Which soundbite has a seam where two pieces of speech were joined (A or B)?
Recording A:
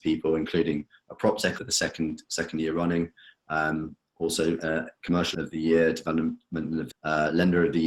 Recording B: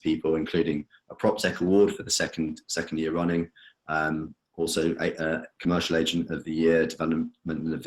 A